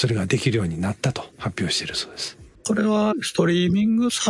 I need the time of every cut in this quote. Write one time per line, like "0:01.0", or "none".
0:01.3
0:02.6